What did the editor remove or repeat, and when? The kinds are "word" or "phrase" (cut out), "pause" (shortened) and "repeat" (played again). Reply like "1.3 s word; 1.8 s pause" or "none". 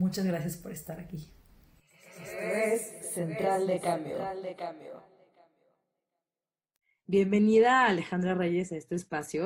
none